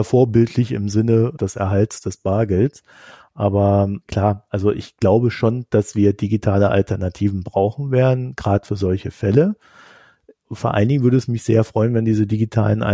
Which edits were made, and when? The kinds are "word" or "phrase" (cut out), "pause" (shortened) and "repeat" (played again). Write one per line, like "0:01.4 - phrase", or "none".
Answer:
0:04.0 - pause